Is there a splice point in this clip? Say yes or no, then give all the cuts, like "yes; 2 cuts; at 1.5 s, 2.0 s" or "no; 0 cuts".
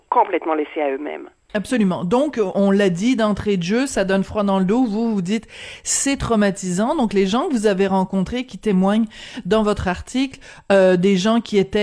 no; 0 cuts